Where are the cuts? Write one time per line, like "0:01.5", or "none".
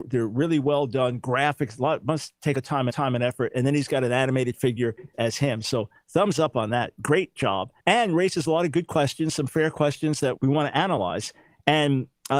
0:02.5
0:02.9
0:05.1
0:07.4
0:07.8
0:10.4